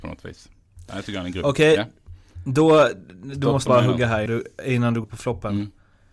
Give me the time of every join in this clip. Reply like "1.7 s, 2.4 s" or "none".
3.7 s, 4.3 s, 5.0 s

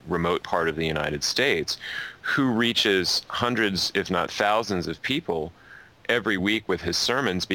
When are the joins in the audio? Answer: none

